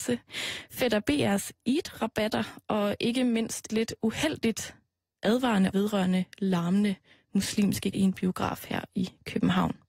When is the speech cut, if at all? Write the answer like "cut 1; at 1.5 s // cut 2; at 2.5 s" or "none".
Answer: cut 1; at 3.7 s // cut 2; at 5.7 s // cut 3; at 7.9 s